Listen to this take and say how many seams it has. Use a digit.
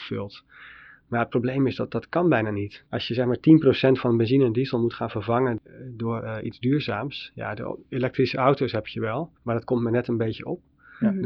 2